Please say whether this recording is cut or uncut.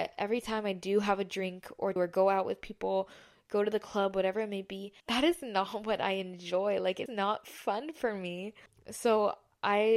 cut